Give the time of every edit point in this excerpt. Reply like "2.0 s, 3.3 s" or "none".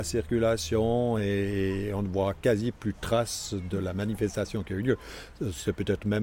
none